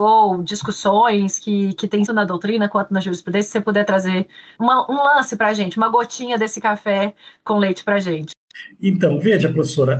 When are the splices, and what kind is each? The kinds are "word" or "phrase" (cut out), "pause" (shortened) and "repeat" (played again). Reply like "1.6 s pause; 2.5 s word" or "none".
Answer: 2.1 s phrase; 4.6 s phrase